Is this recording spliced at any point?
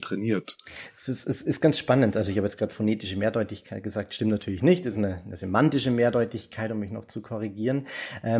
no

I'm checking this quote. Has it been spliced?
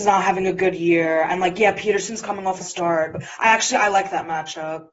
yes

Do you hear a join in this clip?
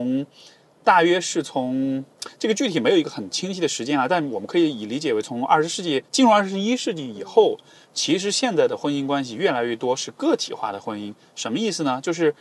yes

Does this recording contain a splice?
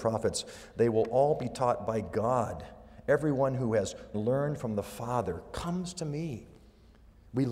yes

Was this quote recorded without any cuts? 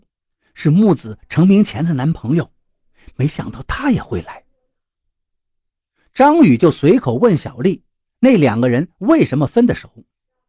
yes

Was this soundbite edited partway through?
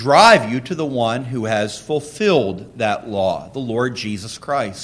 no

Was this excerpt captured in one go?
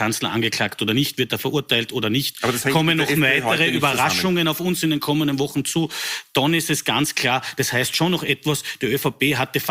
yes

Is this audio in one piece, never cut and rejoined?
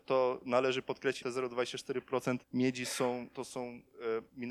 no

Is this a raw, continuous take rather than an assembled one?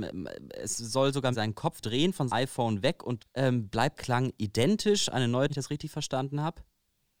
no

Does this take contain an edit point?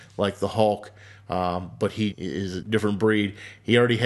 yes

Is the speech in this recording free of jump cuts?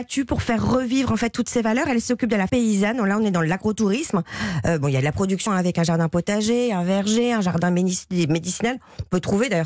no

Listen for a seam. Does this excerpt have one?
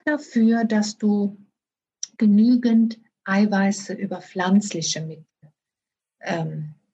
no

